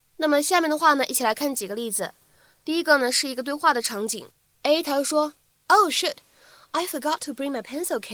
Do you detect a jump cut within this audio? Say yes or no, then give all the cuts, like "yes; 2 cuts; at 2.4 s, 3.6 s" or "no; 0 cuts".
no; 0 cuts